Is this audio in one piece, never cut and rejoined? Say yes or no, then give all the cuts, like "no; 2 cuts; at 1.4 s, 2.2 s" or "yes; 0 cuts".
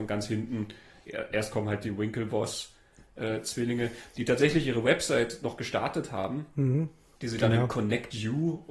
yes; 0 cuts